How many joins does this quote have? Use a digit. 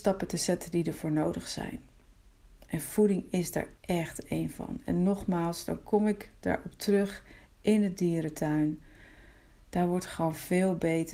0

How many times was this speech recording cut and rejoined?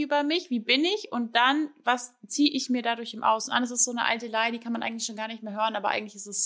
0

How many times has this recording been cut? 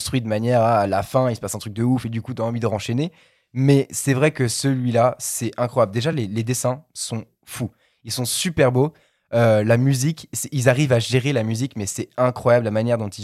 0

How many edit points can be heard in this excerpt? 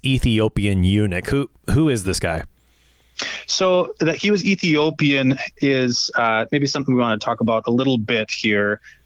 0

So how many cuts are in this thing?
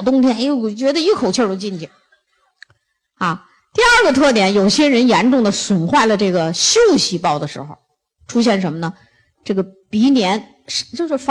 0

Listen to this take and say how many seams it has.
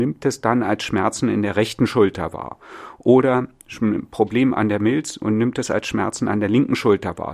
0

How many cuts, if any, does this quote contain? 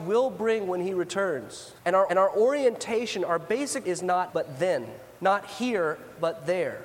5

